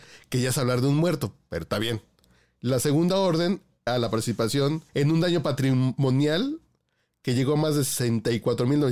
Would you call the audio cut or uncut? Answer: cut